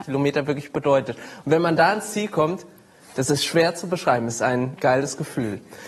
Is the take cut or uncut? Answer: cut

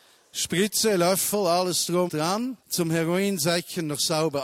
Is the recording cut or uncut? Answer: cut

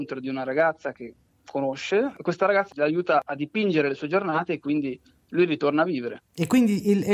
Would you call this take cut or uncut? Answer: uncut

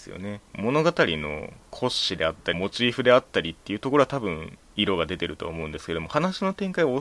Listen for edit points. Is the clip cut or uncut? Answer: cut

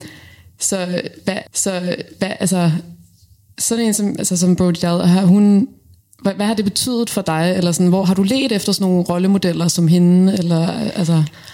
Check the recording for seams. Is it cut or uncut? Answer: cut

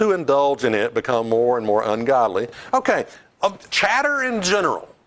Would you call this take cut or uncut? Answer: cut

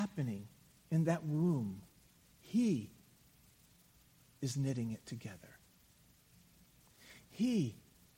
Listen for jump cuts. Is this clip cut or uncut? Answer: uncut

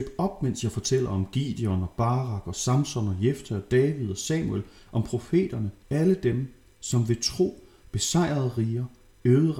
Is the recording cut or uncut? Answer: cut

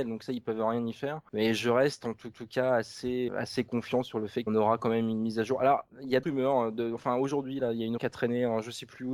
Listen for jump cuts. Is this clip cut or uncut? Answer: cut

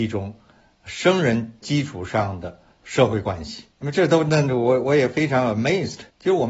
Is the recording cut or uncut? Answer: cut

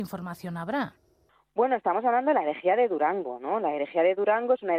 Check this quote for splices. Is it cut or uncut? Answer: uncut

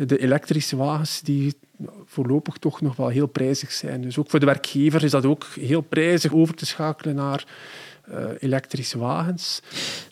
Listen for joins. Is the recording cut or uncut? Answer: cut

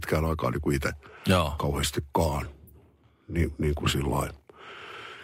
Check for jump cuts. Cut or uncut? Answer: uncut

